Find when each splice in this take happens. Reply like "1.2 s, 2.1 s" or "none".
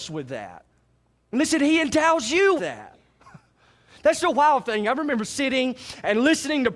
2.6 s